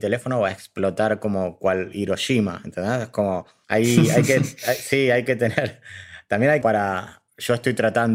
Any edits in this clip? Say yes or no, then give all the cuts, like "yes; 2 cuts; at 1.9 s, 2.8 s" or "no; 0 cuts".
yes; 1 cut; at 6.6 s